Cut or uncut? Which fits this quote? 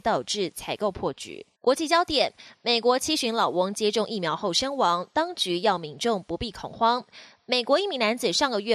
cut